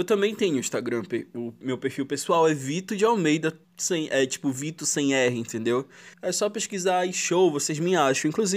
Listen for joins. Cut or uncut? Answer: cut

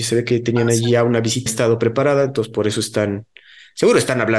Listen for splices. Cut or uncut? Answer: cut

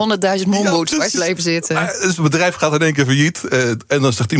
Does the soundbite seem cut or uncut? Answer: cut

